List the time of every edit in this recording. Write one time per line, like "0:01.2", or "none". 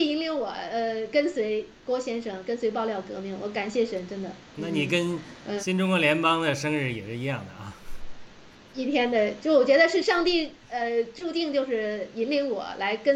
none